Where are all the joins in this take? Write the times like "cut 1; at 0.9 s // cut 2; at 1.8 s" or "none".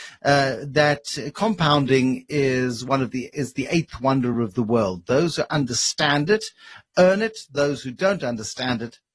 none